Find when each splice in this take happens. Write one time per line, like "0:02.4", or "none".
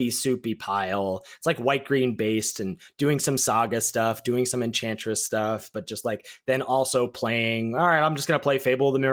none